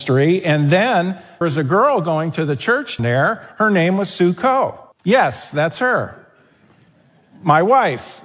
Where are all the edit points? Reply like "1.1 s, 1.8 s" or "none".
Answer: 1.4 s, 3.0 s, 4.9 s